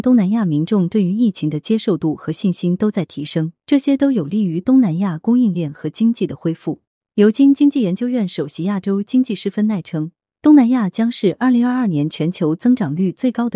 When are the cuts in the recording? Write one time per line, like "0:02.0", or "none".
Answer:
0:03.6
0:06.9